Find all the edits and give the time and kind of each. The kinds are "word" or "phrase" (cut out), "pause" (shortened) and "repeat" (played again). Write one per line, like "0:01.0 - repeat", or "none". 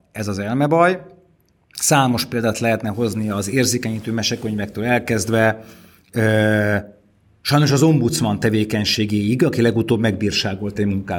none